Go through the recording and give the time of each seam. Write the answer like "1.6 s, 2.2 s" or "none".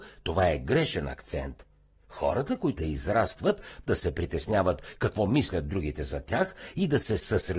2.8 s, 3.9 s